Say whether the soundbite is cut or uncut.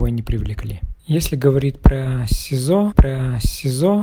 cut